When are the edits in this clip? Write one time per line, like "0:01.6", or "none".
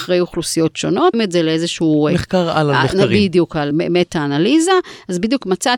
0:01.1
0:03.7